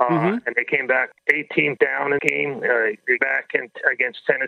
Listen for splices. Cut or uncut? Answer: cut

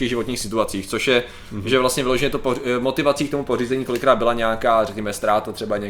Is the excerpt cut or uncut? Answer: uncut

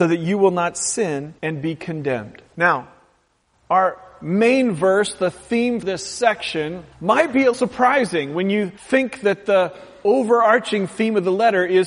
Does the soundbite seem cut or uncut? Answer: cut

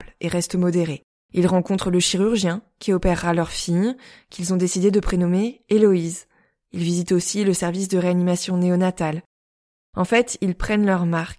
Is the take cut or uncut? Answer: uncut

